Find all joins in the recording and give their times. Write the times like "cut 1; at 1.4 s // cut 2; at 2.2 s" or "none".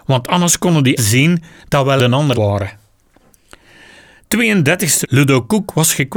cut 1; at 1.0 s // cut 2; at 2.0 s // cut 3; at 2.3 s // cut 4; at 5.0 s